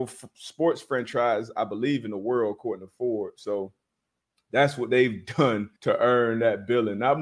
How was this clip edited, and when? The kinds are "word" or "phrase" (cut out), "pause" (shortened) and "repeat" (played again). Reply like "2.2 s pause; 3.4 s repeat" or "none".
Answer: 5.8 s pause